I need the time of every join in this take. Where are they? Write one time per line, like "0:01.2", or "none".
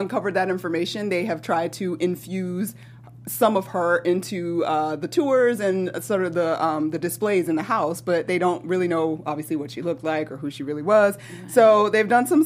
none